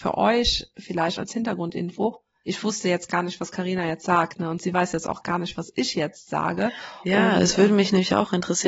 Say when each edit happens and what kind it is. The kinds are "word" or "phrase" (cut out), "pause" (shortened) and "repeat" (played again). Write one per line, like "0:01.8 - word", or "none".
none